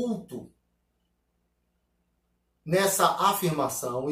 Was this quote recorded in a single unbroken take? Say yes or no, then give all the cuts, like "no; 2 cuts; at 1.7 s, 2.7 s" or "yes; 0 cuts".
yes; 0 cuts